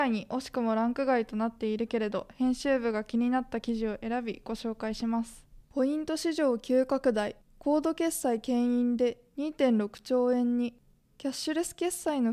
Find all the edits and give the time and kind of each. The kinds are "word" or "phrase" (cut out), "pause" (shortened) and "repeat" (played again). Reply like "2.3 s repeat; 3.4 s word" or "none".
5.6 s pause; 10.9 s pause